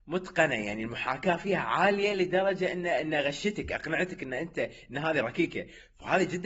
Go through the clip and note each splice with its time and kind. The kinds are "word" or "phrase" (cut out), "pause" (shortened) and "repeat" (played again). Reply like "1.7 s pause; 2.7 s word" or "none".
none